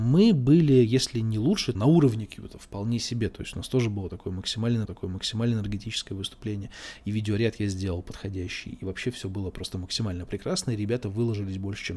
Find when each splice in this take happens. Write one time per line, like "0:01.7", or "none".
0:01.7
0:04.8